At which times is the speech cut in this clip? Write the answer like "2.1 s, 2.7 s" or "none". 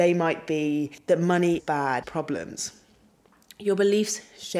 1.6 s, 2.0 s